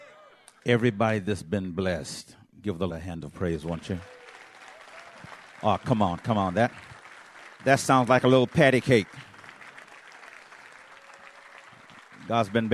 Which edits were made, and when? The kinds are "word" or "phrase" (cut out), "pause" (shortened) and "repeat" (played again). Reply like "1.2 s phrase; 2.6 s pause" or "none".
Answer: 2.9 s word